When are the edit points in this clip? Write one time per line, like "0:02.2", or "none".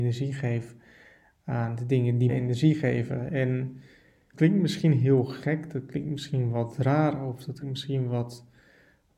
0:02.3
0:04.3
0:07.6